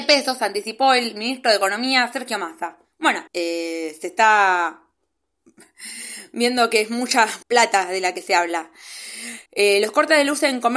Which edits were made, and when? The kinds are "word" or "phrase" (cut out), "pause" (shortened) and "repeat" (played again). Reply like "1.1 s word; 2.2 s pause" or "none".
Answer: 3.3 s pause; 7.4 s pause; 9.5 s pause